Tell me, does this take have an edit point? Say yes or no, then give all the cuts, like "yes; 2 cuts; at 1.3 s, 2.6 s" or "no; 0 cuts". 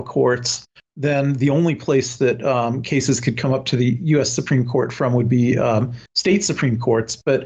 no; 0 cuts